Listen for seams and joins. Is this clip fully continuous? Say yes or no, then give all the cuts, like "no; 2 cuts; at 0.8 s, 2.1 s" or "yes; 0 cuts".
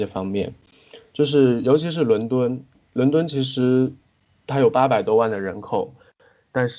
yes; 0 cuts